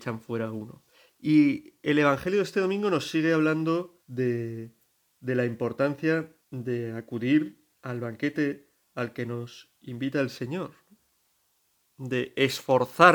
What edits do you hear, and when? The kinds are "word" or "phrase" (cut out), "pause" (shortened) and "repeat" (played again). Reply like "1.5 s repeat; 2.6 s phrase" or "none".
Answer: 0.9 s pause; 4.0 s pause; 6.4 s pause; 7.7 s pause